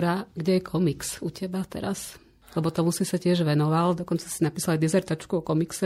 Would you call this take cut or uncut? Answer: uncut